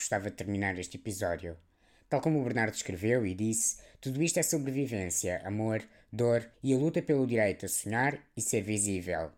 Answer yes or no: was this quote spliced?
yes